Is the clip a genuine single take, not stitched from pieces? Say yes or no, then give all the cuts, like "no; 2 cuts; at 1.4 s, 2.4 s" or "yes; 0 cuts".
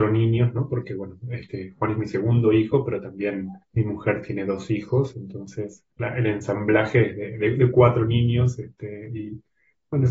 no; 2 cuts; at 3.6 s, 5.9 s